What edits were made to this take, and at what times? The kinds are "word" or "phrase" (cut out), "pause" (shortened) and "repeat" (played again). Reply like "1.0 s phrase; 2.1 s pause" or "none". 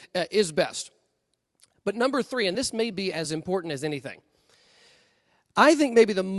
none